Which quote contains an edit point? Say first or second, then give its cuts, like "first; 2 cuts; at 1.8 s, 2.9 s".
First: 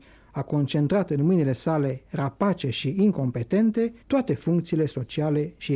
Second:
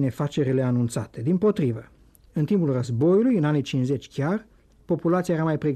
first; 1 cut; at 4.0 s